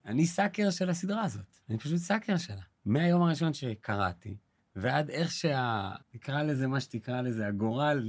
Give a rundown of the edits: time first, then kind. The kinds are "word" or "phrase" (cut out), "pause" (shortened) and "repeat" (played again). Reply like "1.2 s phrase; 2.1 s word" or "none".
1.6 s pause; 2.7 s pause; 4.6 s pause; 6.0 s pause